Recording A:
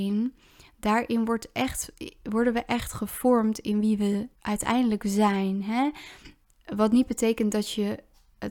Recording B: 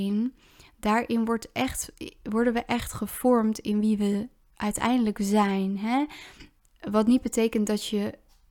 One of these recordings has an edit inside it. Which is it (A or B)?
A